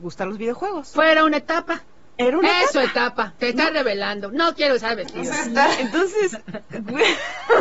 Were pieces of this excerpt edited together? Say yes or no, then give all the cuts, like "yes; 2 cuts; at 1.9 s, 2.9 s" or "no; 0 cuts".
no; 0 cuts